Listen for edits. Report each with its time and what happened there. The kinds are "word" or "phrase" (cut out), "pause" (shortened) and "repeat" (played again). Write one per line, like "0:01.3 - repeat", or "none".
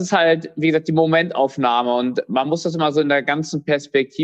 none